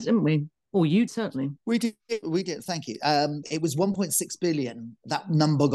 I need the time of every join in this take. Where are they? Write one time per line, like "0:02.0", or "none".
0:01.1
0:03.4